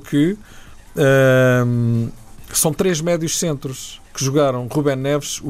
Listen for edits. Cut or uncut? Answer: cut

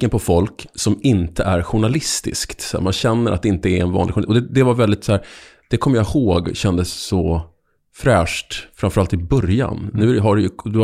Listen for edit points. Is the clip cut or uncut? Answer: uncut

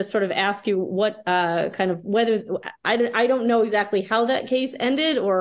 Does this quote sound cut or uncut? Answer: cut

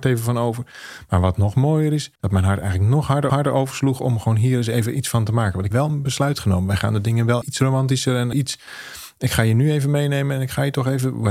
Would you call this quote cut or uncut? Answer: cut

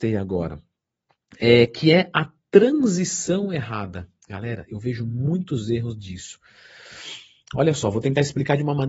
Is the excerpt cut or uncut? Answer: uncut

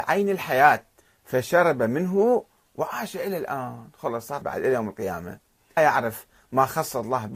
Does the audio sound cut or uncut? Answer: cut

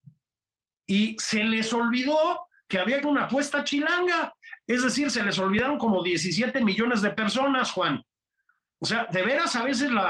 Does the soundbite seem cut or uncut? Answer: cut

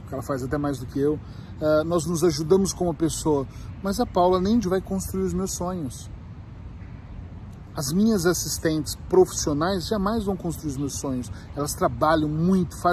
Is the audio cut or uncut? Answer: cut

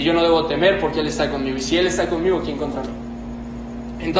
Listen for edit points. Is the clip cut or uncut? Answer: uncut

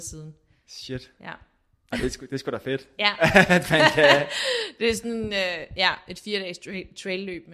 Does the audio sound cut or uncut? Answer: uncut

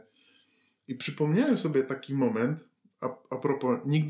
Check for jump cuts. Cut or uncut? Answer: uncut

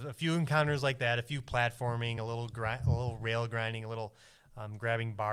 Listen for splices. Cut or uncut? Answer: uncut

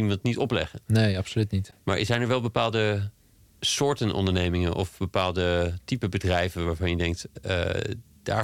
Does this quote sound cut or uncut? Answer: uncut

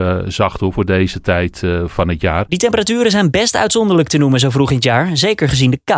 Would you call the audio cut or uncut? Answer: uncut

